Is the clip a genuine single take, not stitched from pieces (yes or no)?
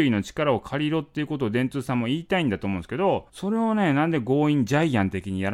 no